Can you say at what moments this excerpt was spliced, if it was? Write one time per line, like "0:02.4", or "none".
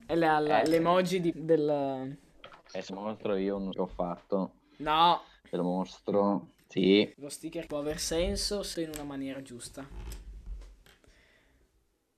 0:01.3
0:02.9
0:03.7
0:07.1
0:07.7
0:08.7